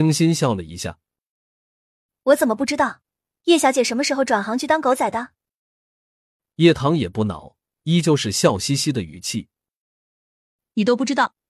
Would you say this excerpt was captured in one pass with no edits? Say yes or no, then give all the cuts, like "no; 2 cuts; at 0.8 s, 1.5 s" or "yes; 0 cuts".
yes; 0 cuts